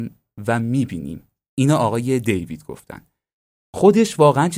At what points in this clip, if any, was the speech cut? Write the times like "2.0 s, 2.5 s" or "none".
none